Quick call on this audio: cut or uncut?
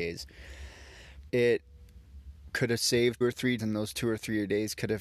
cut